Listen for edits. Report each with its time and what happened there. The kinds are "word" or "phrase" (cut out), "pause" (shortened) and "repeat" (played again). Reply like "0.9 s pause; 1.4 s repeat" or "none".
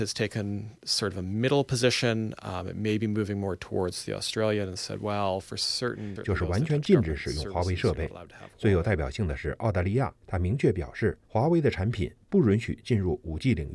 6.2 s word; 10.2 s pause; 11.2 s pause